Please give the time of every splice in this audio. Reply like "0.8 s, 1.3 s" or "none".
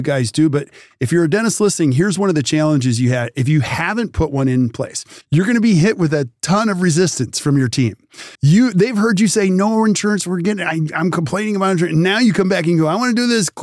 5.2 s, 8.3 s